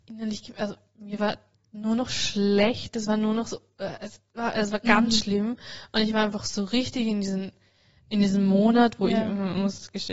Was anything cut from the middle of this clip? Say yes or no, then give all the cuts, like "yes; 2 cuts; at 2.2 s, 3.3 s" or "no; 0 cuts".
no; 0 cuts